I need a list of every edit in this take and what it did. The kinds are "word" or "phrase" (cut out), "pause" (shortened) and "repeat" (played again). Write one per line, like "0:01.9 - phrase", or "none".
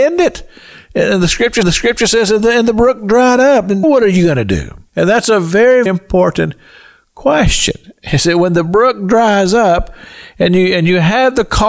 0:01.6 - repeat
0:03.8 - word
0:04.9 - pause
0:05.9 - word